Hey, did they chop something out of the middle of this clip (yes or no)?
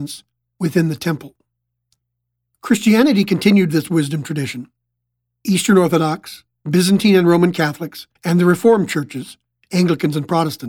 yes